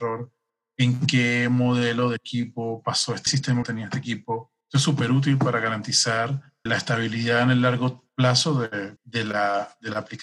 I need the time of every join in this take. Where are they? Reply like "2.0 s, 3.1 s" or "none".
3.3 s, 3.6 s, 4.6 s, 6.7 s, 8.1 s, 9.0 s

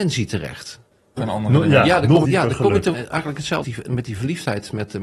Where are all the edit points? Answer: 1.2 s, 2.2 s, 2.9 s, 3.6 s

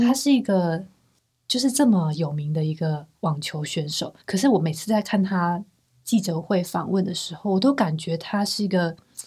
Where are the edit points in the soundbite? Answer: 1.2 s, 4.2 s

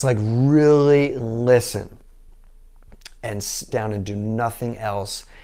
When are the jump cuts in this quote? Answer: 3.7 s

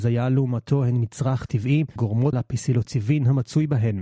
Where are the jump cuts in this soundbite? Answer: 2.0 s, 2.3 s

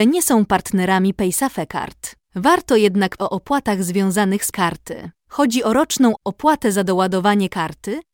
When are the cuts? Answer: 2.2 s, 3.2 s, 4.5 s, 5.2 s, 6.2 s

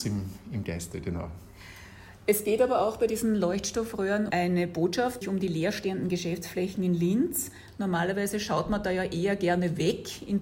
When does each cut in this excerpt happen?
4.3 s, 5.2 s

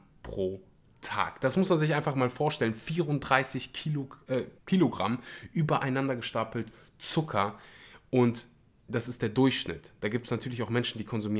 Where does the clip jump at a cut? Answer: 4.6 s

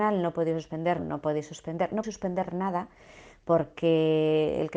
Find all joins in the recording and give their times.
1.0 s, 2.0 s

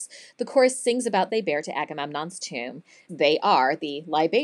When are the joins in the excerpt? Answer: 1.3 s, 3.1 s

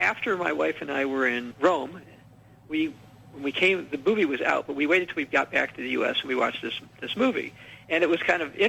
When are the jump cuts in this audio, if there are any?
1.5 s

